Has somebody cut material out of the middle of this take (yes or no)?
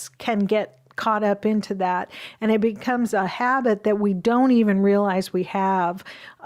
no